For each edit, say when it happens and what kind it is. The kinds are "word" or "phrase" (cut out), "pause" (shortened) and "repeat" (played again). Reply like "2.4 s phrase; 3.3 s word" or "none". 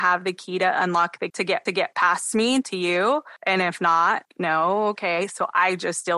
1.3 s word; 1.7 s repeat; 2.6 s phrase; 3.4 s pause; 4.3 s word